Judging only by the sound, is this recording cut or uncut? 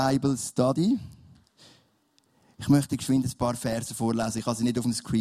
uncut